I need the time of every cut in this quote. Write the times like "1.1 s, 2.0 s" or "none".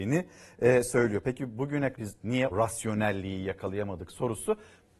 1.9 s, 2.5 s